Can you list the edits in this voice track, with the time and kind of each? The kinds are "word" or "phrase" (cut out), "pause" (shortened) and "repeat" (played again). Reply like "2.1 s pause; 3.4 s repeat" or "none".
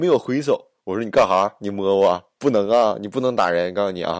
2.4 s pause